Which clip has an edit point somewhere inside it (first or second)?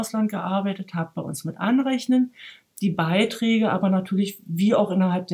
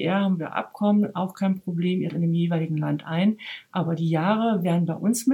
second